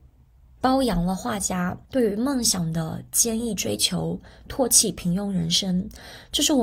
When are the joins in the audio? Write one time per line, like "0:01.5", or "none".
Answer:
0:01.8